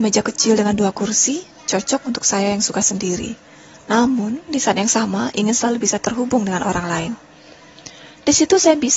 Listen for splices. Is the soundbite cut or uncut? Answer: uncut